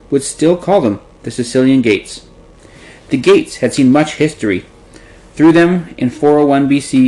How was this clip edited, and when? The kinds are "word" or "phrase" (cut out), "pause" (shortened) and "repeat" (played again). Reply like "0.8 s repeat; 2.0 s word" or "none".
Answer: none